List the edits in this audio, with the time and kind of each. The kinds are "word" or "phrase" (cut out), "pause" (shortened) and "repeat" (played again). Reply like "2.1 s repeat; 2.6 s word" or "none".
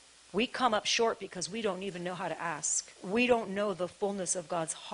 2.9 s pause